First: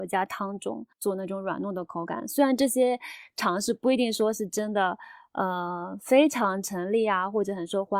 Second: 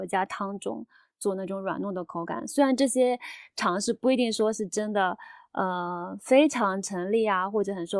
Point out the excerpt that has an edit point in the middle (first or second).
first